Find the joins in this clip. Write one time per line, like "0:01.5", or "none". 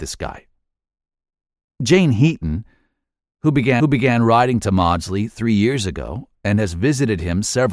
0:03.8